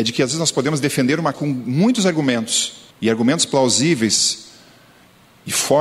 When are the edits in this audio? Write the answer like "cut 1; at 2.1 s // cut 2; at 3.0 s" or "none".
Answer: cut 1; at 1.3 s // cut 2; at 2.9 s